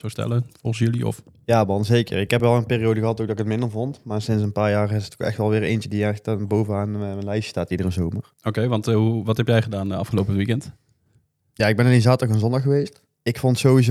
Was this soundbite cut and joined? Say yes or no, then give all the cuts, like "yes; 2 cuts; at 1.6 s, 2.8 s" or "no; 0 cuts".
no; 0 cuts